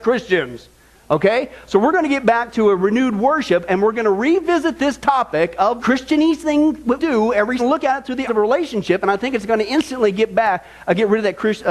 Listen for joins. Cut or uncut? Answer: cut